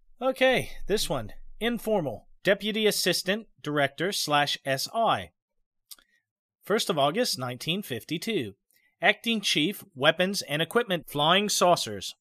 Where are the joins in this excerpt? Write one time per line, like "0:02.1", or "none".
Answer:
0:11.0